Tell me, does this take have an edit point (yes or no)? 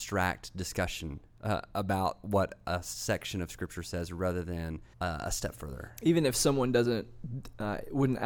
yes